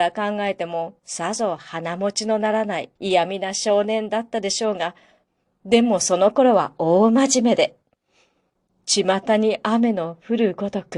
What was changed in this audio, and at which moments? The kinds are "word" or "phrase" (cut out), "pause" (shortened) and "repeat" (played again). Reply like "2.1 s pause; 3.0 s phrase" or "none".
3.0 s pause